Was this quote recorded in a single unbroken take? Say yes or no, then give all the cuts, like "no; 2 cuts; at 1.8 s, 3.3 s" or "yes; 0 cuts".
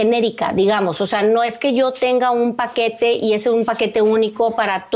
yes; 0 cuts